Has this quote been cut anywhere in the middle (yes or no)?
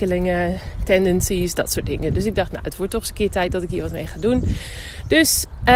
no